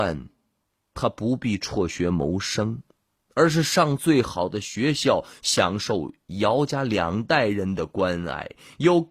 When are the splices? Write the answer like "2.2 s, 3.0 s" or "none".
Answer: none

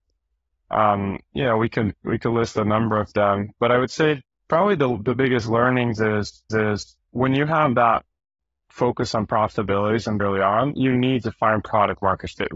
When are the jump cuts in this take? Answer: 4.3 s, 6.5 s, 10.2 s

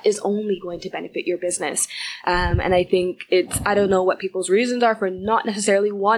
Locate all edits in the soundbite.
none

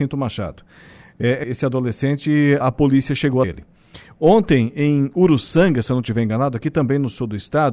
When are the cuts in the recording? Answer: 1.4 s, 2.6 s, 3.4 s

